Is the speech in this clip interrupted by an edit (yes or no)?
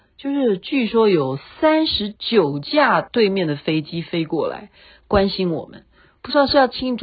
no